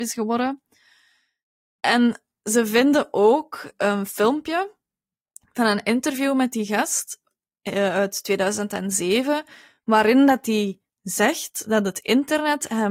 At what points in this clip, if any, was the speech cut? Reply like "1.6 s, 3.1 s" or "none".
none